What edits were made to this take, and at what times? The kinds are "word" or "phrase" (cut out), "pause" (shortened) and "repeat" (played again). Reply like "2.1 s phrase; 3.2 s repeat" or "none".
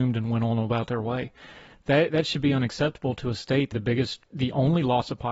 2.1 s word; 3.7 s word